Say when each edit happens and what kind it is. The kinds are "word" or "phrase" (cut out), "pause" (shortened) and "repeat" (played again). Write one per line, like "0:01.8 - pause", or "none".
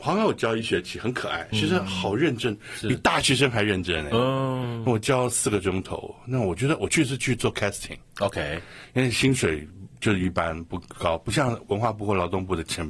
0:01.5 - word